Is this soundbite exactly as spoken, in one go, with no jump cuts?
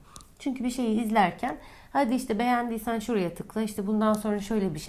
yes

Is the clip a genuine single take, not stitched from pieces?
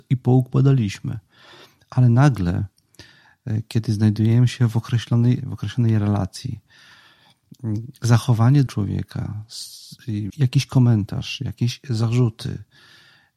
no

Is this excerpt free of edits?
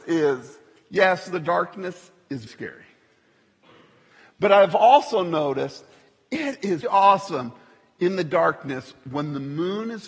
no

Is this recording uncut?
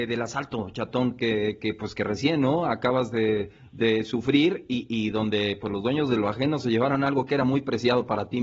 yes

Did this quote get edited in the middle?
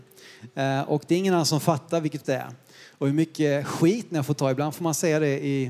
yes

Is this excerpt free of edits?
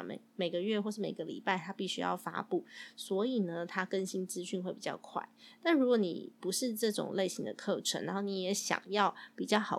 yes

